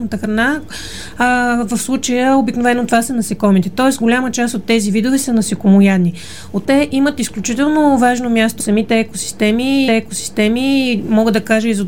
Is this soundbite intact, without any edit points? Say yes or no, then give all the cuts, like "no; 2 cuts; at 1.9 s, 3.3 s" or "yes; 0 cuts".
no; 3 cuts; at 6.6 s, 8.6 s, 9.9 s